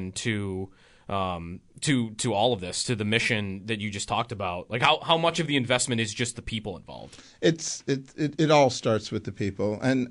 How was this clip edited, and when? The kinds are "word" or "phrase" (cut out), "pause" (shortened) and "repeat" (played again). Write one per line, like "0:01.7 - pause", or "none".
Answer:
none

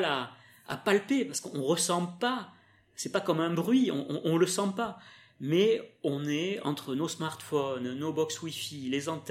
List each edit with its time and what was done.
none

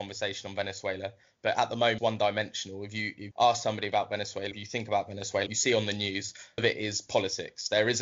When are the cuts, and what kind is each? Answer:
0:02.0 - word
0:03.3 - word
0:04.5 - word
0:05.5 - word
0:06.6 - word

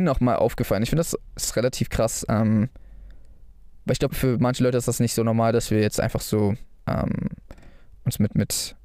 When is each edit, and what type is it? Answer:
0:04.1 - word
0:06.8 - pause

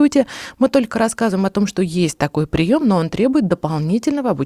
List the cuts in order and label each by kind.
none

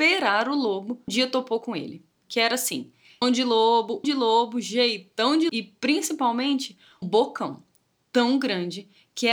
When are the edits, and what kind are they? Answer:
0:01.1 - word
0:03.2 - word
0:04.0 - word
0:05.5 - word
0:07.0 - word

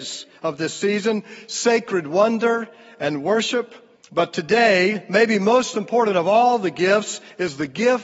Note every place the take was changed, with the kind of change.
0:04.0 - pause

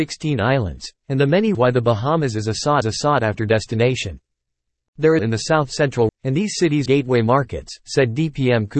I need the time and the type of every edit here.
0:01.0 - pause
0:01.5 - word
0:02.8 - repeat
0:05.2 - phrase
0:06.1 - word
0:06.9 - phrase

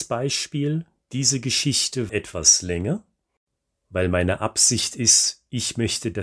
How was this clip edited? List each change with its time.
0:02.1 - word

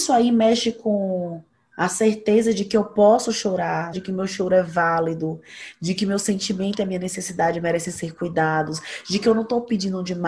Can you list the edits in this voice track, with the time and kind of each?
0:03.9 - word

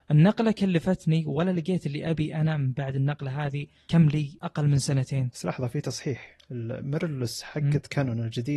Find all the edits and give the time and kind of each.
0:05.3 - word

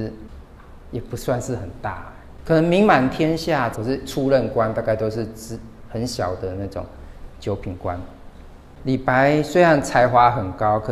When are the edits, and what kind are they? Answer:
0:03.7 - phrase

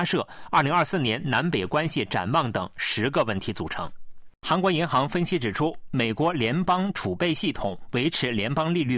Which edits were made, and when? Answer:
0:04.3 - pause

